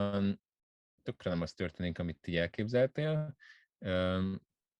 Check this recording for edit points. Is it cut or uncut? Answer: uncut